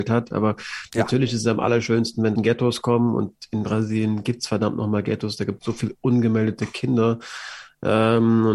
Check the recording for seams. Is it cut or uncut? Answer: cut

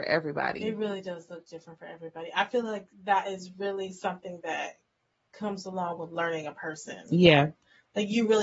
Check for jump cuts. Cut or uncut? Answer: cut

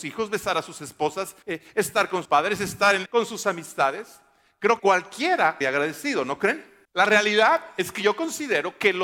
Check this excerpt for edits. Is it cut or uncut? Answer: cut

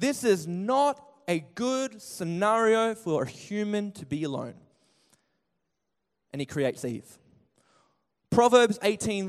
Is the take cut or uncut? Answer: uncut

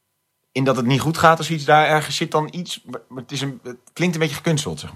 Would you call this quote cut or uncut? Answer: uncut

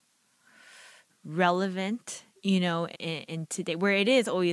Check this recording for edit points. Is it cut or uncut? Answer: cut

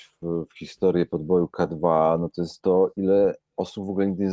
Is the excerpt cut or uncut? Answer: uncut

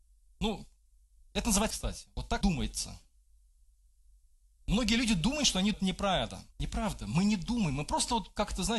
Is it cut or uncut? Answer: cut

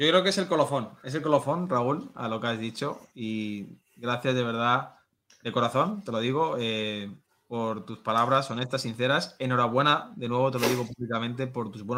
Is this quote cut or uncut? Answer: uncut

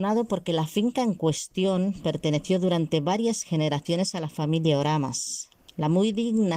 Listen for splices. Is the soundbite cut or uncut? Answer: uncut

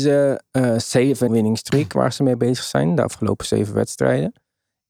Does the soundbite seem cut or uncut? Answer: cut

